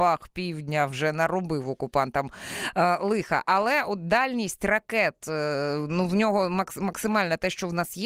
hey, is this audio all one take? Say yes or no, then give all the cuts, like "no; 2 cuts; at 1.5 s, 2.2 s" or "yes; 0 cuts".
yes; 0 cuts